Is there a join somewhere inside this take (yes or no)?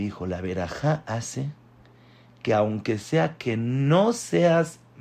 no